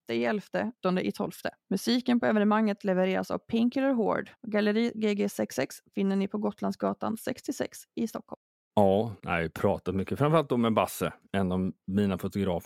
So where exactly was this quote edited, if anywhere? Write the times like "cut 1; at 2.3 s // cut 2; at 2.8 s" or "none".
none